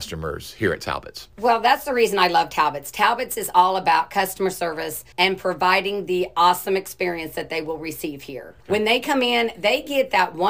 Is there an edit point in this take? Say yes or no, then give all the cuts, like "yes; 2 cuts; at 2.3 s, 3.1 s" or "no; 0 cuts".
yes; 1 cut; at 5.1 s